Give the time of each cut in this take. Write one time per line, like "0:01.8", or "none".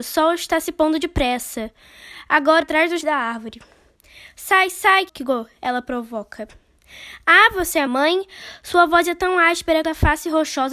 0:02.6
0:03.0
0:05.1
0:07.9
0:09.8